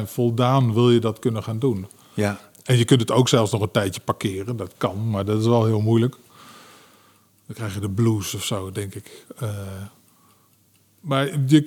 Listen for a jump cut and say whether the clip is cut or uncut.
uncut